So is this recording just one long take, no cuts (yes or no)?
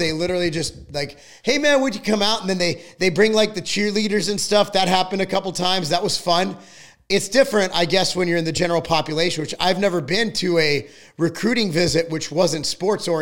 yes